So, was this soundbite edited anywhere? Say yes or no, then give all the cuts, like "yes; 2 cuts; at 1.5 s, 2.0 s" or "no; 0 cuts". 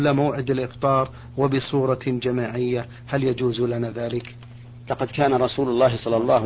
no; 0 cuts